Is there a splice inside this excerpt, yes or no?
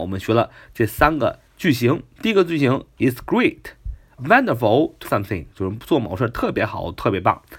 yes